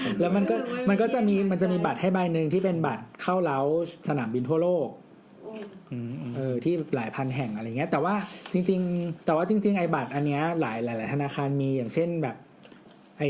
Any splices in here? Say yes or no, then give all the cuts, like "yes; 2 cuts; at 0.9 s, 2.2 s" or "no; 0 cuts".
yes; 1 cut; at 9.2 s